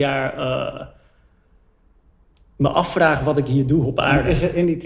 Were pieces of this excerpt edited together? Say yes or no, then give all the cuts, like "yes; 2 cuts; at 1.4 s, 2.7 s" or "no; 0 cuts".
no; 0 cuts